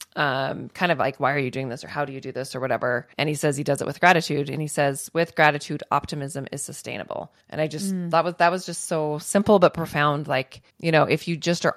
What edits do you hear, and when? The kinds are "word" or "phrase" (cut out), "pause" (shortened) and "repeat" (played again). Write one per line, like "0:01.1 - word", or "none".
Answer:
0:03.1 - pause
0:07.4 - pause
0:10.7 - pause